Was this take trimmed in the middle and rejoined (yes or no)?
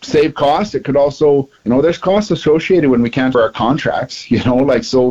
yes